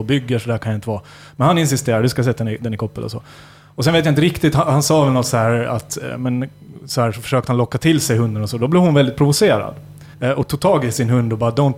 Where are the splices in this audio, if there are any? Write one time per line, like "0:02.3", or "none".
0:10.1